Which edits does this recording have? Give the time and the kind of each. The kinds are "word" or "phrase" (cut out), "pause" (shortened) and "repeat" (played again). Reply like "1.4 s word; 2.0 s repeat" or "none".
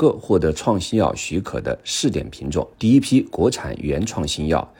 2.7 s pause